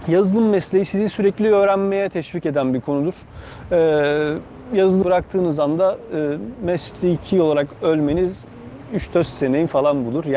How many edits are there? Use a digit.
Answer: 1